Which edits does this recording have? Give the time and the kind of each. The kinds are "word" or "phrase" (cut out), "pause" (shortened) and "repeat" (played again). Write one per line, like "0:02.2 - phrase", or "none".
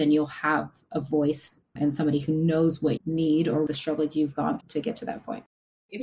0:03.0 - word
0:04.6 - word